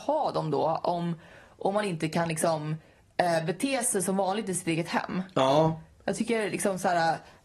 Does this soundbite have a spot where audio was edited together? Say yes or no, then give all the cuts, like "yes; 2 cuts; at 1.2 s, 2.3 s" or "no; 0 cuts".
no; 0 cuts